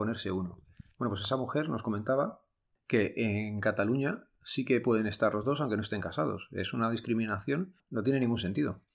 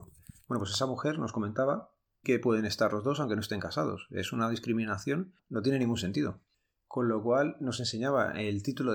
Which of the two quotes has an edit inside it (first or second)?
second